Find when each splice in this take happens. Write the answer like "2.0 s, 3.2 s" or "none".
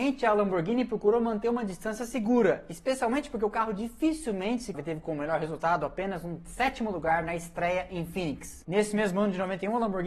4.7 s